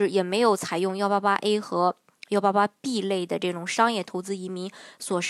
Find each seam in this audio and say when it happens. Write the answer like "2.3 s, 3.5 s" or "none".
none